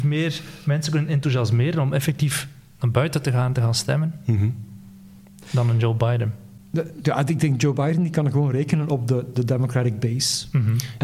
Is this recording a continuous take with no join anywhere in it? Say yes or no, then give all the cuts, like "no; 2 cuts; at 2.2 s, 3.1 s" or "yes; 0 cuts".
yes; 0 cuts